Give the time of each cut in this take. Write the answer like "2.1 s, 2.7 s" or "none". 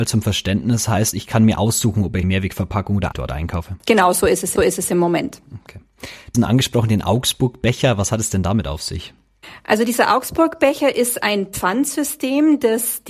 1.1 s, 2.2 s, 3.1 s, 3.8 s, 4.6 s, 6.3 s